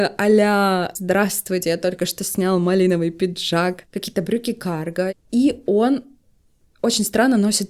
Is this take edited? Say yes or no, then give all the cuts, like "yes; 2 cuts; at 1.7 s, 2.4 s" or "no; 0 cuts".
no; 0 cuts